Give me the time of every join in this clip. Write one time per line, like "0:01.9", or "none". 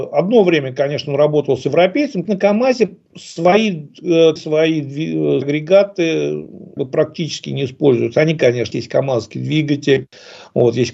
0:02.2
0:03.1
0:04.4
0:05.4
0:06.8
0:08.7